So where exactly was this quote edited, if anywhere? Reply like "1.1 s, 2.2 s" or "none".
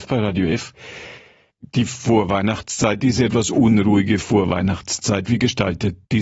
none